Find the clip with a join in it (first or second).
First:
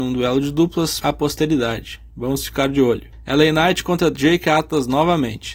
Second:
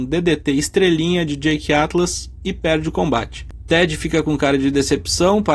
first